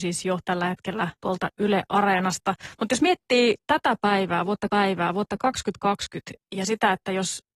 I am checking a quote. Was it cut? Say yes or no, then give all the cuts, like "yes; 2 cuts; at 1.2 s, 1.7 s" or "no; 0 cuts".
yes; 3 cuts; at 1.2 s, 3.6 s, 4.7 s